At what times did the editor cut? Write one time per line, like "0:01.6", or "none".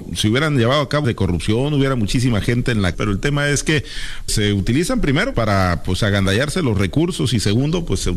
0:01.0
0:02.9
0:04.3
0:05.3